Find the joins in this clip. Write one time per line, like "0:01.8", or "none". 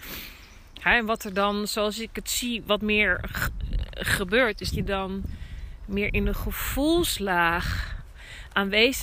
0:04.7